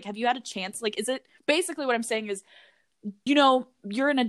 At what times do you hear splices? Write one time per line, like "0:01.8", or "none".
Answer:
0:01.4
0:03.3

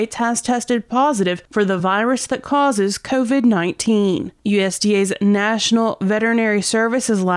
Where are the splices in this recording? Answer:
none

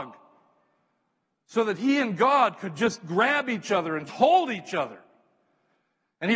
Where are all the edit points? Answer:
0:04.1

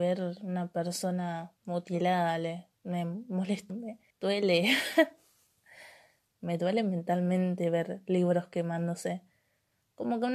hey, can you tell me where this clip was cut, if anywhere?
0:01.6
0:02.7
0:03.7
0:04.1

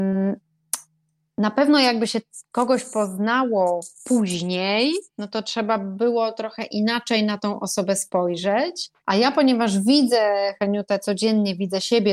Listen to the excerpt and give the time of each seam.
0:03.9
0:09.0

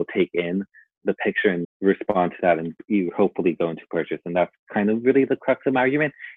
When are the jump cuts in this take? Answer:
0:01.6

